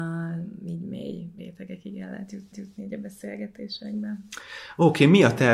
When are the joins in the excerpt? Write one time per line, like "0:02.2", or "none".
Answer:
0:01.4
0:02.5